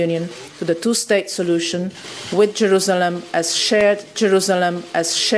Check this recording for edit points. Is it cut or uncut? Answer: cut